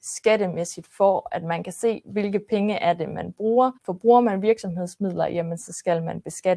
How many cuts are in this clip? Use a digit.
1